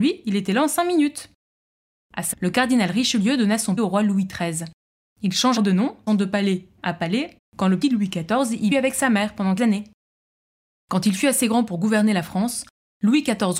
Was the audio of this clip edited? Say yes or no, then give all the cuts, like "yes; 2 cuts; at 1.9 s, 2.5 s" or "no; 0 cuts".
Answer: yes; 9 cuts; at 2.3 s, 3.8 s, 5.6 s, 6.1 s, 6.8 s, 7.4 s, 7.8 s, 8.7 s, 9.6 s